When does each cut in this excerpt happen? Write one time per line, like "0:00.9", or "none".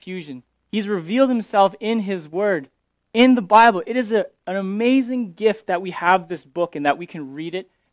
none